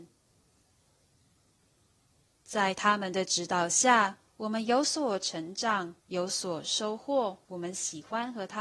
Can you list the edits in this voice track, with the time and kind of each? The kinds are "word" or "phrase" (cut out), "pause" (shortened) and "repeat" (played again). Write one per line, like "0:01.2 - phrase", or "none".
0:04.3 - pause
0:06.0 - pause
0:07.4 - pause

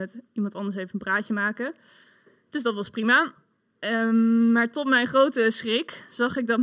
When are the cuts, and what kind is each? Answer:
none

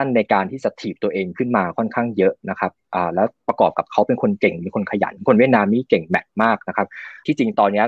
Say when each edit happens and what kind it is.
none

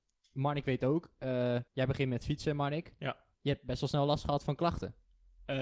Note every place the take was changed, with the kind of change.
0:01.7 - pause
0:03.3 - pause

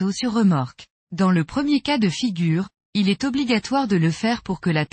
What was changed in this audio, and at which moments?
0:00.9 - pause

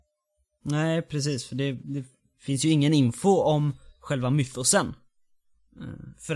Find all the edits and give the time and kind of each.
none

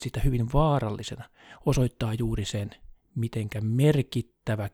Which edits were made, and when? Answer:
none

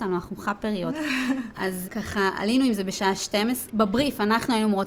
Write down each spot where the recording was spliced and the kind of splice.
0:01.8 - word
0:03.7 - word

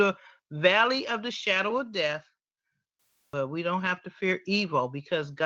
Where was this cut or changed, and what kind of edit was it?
none

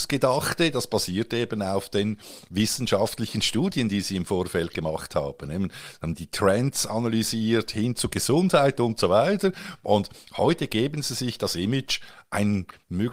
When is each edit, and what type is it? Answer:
none

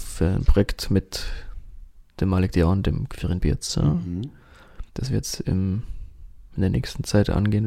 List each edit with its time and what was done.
0:02.1 - pause
0:04.9 - pause

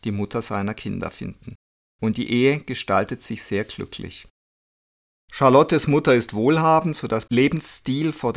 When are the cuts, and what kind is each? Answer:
0:07.3 - word

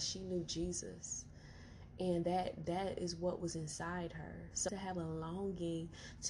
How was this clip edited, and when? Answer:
0:04.7 - phrase

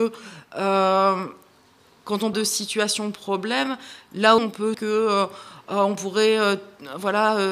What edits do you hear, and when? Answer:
0:02.3 - word
0:04.4 - word
0:04.7 - word

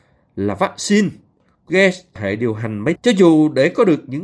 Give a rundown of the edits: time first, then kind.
0:01.7 - word
0:02.2 - word
0:03.0 - word

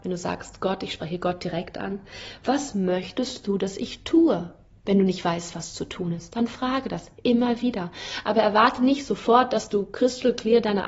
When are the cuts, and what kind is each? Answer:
none

